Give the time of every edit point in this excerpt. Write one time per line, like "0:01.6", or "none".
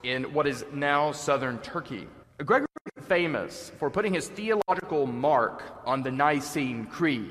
0:02.2